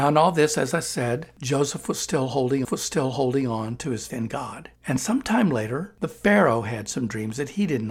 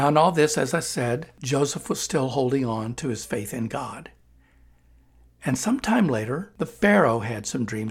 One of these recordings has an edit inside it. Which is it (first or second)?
first